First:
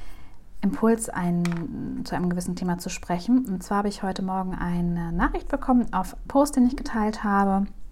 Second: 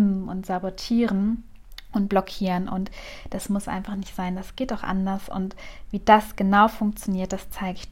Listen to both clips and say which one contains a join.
first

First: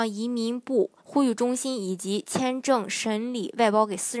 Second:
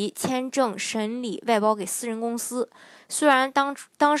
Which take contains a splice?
first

